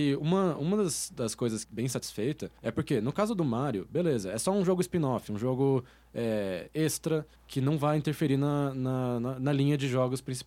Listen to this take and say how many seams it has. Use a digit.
3